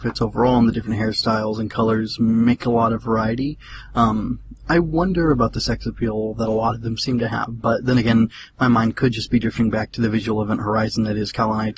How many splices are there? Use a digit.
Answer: 0